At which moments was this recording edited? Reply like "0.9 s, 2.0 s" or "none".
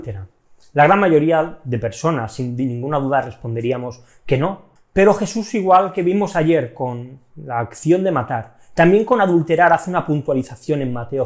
4.8 s